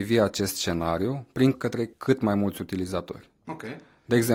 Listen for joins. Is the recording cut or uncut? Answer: cut